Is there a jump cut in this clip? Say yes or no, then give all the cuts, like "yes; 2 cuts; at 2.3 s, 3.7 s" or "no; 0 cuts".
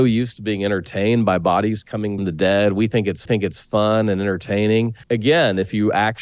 yes; 3 cuts; at 2.2 s, 3.3 s, 5.0 s